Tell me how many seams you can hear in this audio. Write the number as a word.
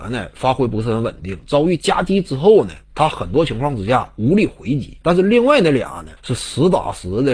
three